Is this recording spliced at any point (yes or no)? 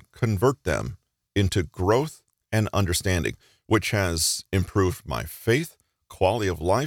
no